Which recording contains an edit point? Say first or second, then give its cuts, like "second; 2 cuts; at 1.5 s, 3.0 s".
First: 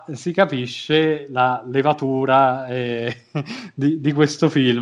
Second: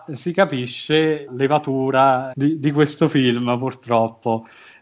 second; 2 cuts; at 1.3 s, 2.3 s